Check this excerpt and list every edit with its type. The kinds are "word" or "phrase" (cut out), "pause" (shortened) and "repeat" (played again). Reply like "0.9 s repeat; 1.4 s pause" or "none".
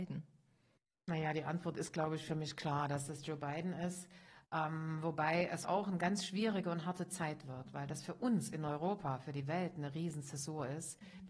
5.6 s word